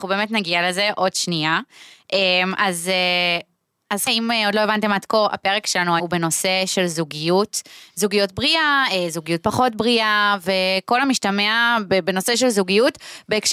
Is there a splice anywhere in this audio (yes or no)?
yes